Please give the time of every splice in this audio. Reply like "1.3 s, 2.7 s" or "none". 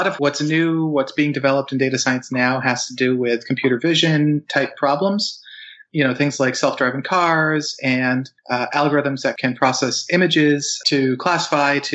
8.4 s